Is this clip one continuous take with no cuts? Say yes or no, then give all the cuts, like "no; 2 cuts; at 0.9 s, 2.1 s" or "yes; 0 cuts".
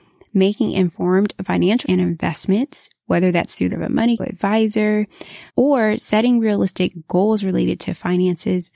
no; 4 cuts; at 1.8 s, 3.7 s, 4.2 s, 5.5 s